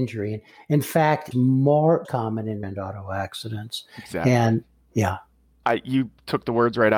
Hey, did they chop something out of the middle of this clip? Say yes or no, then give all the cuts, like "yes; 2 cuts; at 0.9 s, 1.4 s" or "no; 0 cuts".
yes; 4 cuts; at 1.3 s, 2.0 s, 2.6 s, 5.6 s